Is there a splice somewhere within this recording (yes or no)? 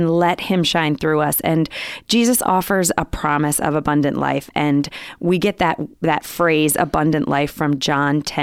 no